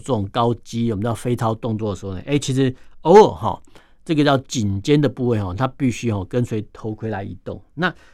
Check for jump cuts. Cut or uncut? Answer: uncut